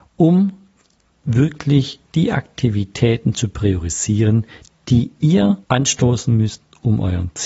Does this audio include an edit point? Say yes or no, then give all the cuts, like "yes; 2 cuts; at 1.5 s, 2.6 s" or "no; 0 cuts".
yes; 1 cut; at 5.6 s